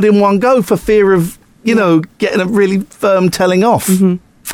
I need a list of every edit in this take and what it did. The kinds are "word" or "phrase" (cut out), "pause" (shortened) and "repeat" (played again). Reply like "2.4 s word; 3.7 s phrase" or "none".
none